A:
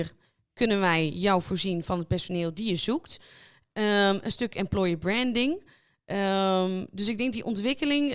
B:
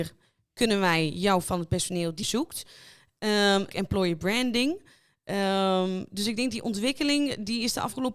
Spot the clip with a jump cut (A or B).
B